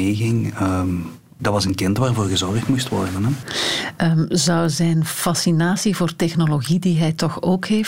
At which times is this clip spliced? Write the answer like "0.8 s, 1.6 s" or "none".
1.4 s